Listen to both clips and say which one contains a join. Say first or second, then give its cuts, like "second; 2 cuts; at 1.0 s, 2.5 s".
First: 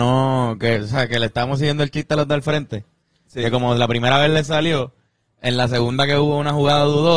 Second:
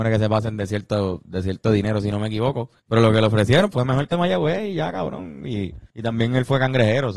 second; 4 cuts; at 2.8 s, 3.7 s, 4.1 s, 5.9 s